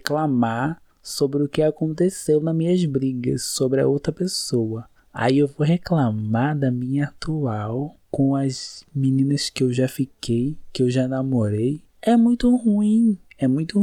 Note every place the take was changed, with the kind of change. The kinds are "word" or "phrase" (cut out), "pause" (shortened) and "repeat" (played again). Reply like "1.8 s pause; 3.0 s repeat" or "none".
8.0 s pause; 11.9 s pause